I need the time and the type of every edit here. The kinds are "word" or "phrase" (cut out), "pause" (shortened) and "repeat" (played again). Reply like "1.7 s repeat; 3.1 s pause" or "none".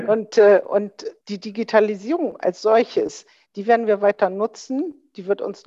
1.2 s pause